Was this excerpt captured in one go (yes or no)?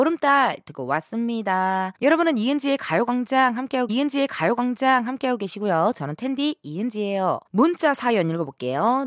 no